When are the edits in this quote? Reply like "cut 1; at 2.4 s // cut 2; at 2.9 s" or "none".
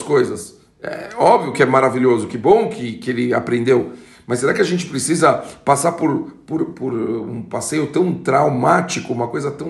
none